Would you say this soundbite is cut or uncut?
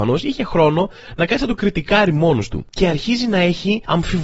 uncut